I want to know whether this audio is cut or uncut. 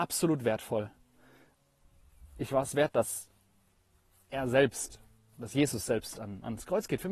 uncut